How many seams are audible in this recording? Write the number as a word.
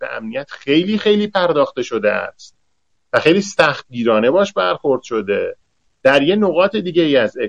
zero